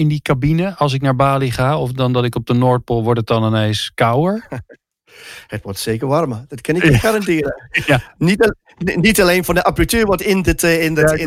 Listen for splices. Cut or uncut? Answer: uncut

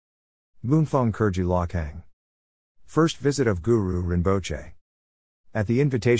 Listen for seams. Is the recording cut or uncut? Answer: uncut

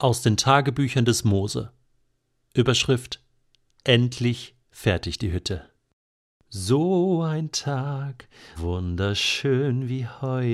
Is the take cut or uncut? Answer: cut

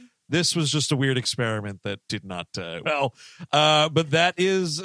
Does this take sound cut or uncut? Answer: cut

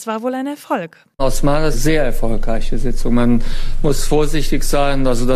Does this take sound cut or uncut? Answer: cut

